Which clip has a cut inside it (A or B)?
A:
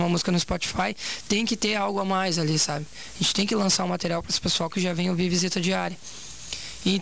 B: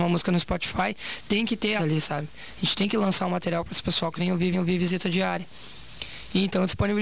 B